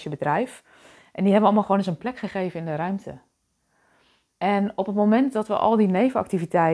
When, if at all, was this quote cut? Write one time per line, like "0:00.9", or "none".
none